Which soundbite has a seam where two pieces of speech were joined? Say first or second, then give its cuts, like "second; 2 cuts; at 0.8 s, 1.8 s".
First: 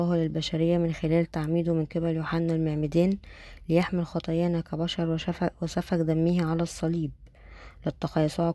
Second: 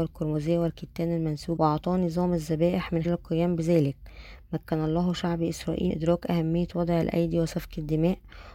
second; 3 cuts; at 1.6 s, 3.0 s, 5.9 s